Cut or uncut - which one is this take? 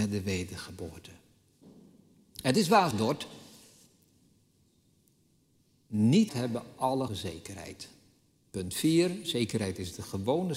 cut